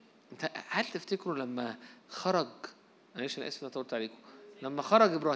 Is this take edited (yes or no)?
no